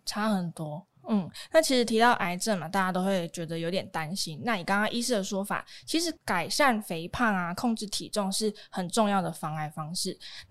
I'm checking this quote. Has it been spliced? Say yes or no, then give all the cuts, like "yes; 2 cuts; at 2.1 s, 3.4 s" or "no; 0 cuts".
yes; 1 cut; at 1.0 s